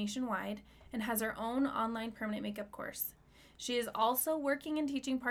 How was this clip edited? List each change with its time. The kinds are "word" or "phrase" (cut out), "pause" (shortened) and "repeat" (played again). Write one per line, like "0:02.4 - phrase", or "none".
none